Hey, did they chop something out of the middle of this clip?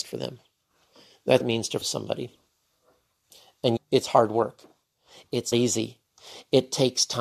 yes; 4 cuts; at 1.4 s, 1.8 s, 3.8 s, 5.5 s

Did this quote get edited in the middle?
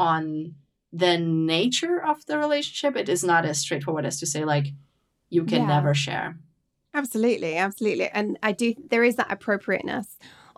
no; 0 cuts

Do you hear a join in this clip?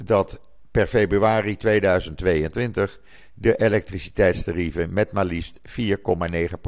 no; 0 cuts

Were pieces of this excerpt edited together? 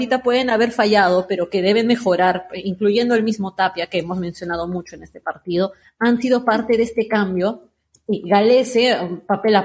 no; 0 cuts

